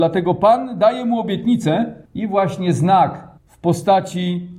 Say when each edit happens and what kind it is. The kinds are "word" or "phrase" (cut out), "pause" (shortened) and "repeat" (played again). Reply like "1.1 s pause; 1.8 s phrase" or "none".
2.0 s pause; 3.4 s pause